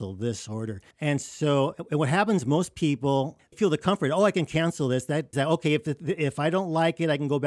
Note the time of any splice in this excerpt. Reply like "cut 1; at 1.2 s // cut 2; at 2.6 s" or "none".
cut 1; at 0.9 s // cut 2; at 3.5 s // cut 3; at 5.3 s